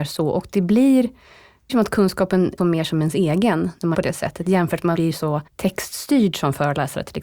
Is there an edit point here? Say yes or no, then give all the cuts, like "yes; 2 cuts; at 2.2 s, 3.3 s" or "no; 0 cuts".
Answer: yes; 5 cuts; at 1.7 s, 2.6 s, 3.9 s, 4.9 s, 5.5 s